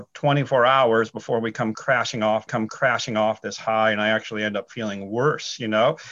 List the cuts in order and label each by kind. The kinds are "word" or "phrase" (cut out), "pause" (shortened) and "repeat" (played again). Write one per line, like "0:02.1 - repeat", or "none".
0:02.5 - repeat